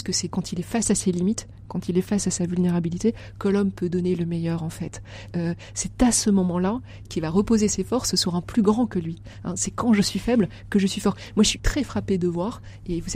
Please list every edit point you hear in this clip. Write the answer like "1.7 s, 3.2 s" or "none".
none